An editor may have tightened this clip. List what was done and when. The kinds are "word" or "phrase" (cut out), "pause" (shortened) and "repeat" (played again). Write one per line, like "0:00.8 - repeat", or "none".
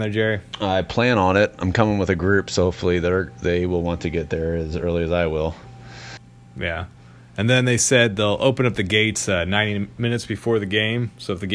none